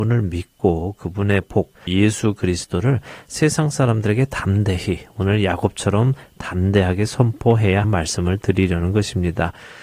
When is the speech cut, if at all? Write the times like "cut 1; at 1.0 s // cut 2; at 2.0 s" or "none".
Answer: cut 1; at 1.9 s // cut 2; at 7.8 s